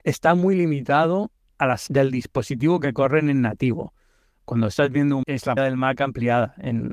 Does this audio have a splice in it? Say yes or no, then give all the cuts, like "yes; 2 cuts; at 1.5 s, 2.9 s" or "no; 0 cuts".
yes; 4 cuts; at 1.5 s, 1.9 s, 5.2 s, 5.6 s